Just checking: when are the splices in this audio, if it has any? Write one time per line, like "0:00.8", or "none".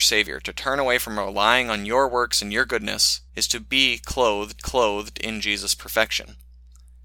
0:03.3
0:04.6